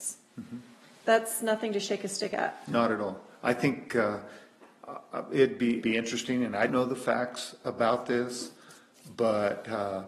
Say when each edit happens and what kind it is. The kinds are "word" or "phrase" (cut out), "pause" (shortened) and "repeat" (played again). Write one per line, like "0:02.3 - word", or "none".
0:05.8 - word
0:06.7 - word

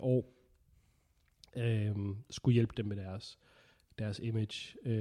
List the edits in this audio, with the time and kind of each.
none

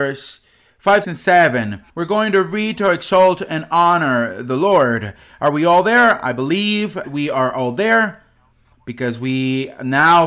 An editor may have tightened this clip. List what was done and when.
0:01.0 - word
0:01.9 - pause
0:07.0 - word

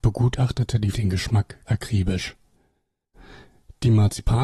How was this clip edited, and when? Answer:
0:00.9 - phrase
0:01.7 - word

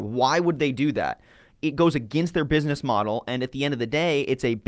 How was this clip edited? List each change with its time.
none

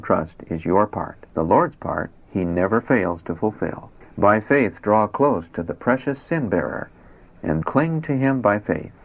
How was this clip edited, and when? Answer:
0:01.3 - pause
0:04.0 - pause
0:07.6 - word

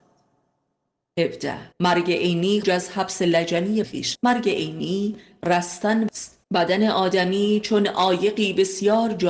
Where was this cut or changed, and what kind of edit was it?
0:01.7 - pause
0:02.6 - word
0:03.8 - word
0:04.1 - word
0:06.1 - word
0:06.4 - pause

